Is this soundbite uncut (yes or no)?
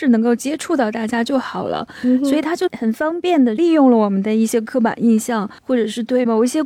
no